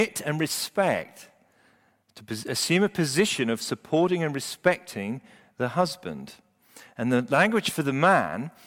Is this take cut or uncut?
uncut